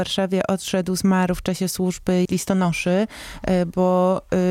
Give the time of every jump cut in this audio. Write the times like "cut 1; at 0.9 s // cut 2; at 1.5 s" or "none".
cut 1; at 2.2 s